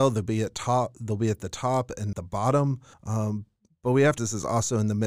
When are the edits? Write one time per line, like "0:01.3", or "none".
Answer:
0:02.1
0:02.9
0:04.2